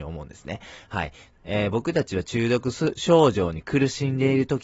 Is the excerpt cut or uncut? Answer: uncut